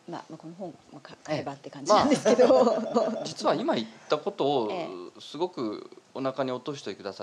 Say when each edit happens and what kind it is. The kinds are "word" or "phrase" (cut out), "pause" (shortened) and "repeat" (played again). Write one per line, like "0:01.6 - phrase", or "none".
0:02.9 - repeat
0:06.1 - pause